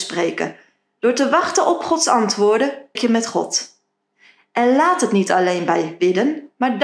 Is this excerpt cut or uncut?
cut